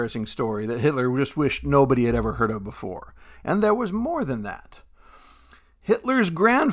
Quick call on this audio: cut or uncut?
uncut